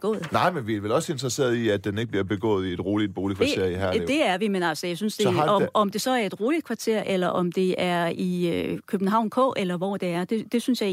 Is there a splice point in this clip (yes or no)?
no